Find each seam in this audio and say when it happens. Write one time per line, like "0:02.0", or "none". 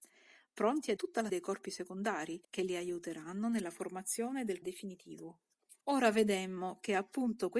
0:01.0
0:01.3
0:02.4
0:04.6
0:05.8